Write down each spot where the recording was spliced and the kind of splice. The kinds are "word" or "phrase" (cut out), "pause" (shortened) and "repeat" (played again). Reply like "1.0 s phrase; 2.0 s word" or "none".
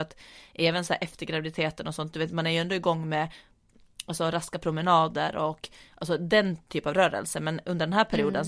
none